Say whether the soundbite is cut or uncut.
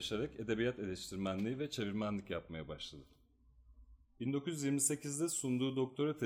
cut